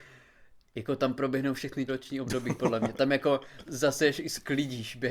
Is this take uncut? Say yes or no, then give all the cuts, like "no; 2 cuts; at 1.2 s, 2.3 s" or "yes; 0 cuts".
no; 2 cuts; at 1.9 s, 3.7 s